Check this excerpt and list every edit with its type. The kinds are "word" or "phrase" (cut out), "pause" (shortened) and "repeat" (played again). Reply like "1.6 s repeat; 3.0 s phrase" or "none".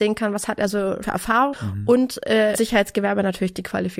1.0 s word; 1.5 s word; 2.5 s word